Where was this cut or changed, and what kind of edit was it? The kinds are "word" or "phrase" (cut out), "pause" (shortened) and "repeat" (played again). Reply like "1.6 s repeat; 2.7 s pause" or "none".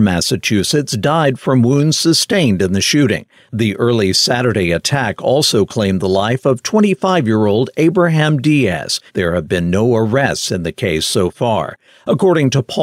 9.1 s pause